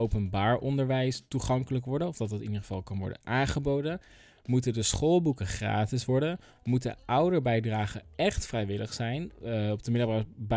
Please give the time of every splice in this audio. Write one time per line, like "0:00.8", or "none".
none